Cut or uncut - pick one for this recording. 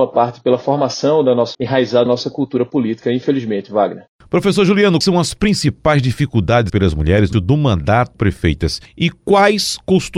cut